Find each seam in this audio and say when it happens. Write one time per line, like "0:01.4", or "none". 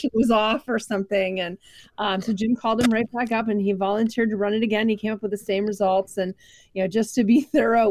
none